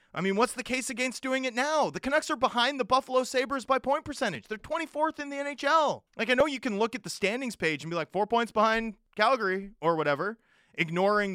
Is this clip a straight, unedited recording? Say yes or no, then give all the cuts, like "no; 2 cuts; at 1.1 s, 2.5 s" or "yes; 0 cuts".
no; 1 cut; at 6.1 s